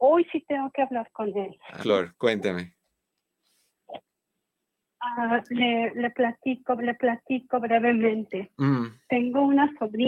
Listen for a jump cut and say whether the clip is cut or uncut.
cut